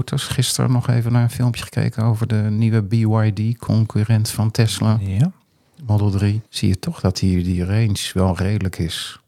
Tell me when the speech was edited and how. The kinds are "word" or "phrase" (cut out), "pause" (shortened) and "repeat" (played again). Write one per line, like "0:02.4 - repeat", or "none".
0:06.5 - pause